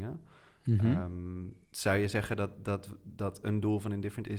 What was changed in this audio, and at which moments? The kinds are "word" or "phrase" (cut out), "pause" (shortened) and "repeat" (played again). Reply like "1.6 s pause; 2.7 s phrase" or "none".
1.6 s pause